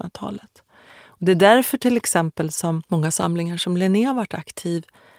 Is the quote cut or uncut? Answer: uncut